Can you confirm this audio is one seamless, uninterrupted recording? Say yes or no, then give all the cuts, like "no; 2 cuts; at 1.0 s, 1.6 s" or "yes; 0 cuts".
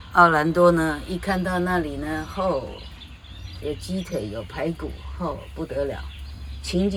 yes; 0 cuts